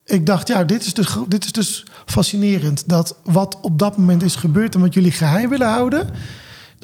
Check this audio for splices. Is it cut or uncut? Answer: uncut